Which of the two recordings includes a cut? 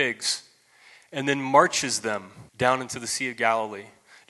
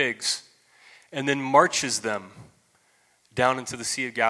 first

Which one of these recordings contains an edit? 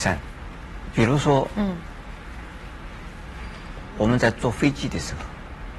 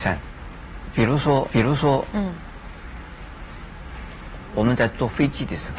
second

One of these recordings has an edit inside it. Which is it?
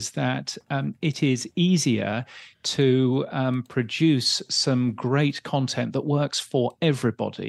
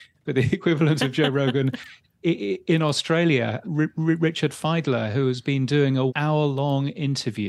second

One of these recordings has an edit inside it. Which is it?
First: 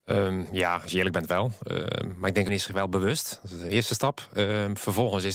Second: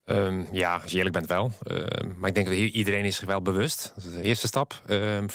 first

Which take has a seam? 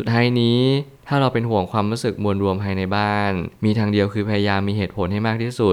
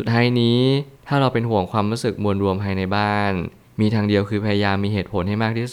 first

